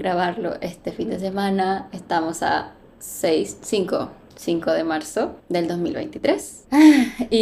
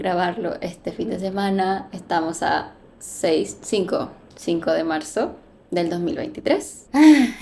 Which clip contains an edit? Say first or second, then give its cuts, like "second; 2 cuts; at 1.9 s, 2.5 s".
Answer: first; 1 cut; at 5.4 s